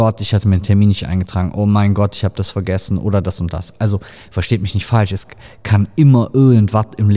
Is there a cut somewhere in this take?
no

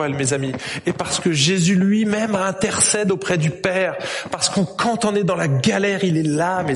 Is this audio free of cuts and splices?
yes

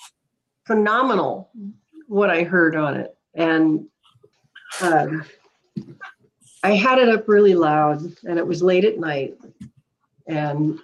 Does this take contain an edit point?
no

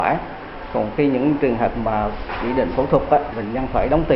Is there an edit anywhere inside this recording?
no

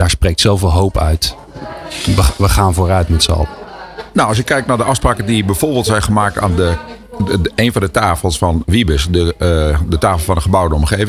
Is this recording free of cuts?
yes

